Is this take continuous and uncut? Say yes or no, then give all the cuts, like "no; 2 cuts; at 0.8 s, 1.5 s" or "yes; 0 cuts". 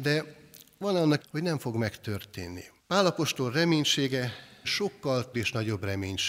no; 4 cuts; at 1.2 s, 2.8 s, 4.6 s, 5.3 s